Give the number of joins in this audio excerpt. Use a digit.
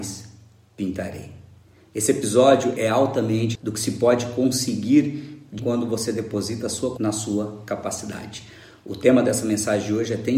3